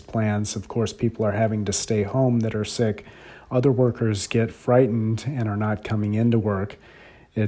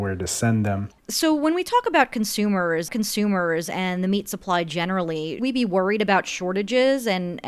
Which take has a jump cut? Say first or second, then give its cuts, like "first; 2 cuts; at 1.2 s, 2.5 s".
second; 3 cuts; at 1.0 s, 2.9 s, 5.4 s